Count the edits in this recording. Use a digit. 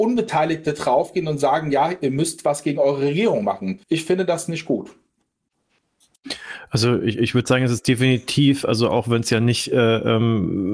1